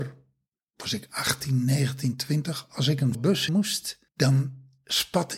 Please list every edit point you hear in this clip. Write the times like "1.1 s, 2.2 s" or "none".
3.1 s, 3.5 s, 4.1 s